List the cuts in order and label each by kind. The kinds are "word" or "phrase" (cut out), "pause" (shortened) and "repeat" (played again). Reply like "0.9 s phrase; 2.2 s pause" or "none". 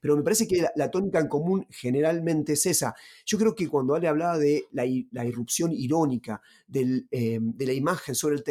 none